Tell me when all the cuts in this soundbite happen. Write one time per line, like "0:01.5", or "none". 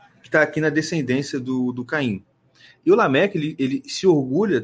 none